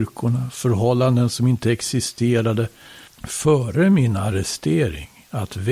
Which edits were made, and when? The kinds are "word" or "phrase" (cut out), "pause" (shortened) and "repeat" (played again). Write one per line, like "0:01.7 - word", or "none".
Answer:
none